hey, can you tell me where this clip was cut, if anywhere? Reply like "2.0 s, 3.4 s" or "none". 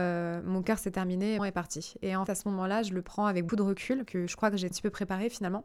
1.4 s, 2.3 s, 3.5 s, 4.1 s, 4.7 s